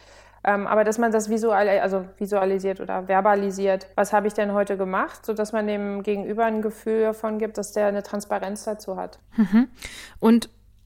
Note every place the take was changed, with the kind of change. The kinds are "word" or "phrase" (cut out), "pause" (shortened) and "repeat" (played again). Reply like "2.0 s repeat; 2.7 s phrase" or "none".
3.9 s pause; 7.5 s word; 9.3 s pause